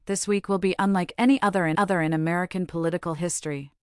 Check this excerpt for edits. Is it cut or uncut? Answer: cut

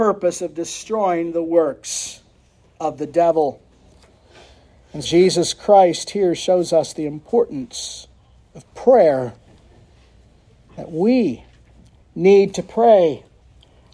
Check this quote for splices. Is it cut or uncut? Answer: cut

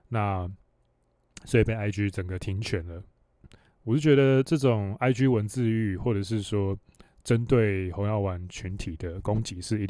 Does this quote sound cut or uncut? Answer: uncut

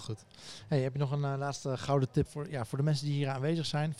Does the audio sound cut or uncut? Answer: cut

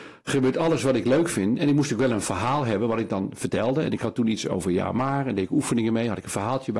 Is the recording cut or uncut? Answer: uncut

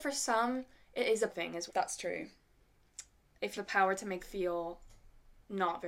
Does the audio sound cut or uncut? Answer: cut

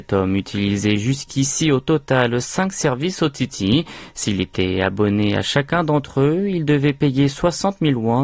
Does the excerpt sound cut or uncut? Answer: uncut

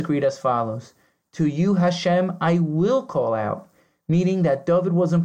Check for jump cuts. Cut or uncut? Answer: uncut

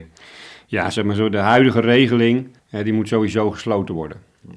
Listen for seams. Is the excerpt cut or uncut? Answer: cut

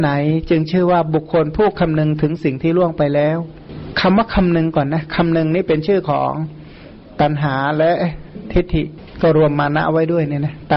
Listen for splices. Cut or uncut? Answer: uncut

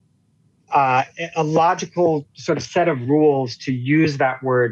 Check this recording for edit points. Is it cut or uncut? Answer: uncut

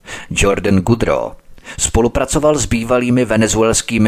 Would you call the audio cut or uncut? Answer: uncut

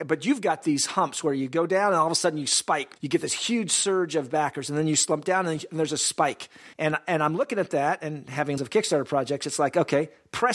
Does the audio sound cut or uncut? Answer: cut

